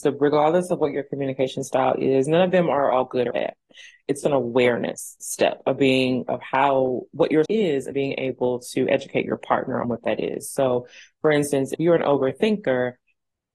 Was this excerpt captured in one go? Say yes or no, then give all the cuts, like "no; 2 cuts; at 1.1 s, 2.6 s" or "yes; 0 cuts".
no; 6 cuts; at 3.3 s, 4.2 s, 6.3 s, 7.4 s, 7.9 s, 9.8 s